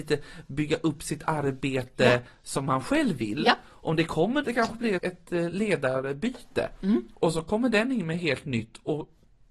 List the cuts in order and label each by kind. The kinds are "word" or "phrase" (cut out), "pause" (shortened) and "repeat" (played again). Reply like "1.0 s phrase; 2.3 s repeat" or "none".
4.4 s phrase; 5.0 s word